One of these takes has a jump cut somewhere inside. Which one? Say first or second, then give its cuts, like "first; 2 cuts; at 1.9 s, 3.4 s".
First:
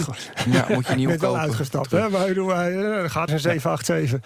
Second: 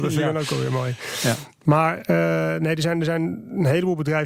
first; 1 cut; at 3.3 s